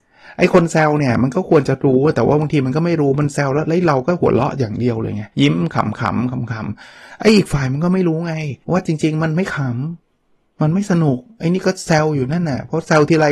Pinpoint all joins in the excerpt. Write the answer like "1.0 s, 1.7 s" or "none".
5.3 s, 8.6 s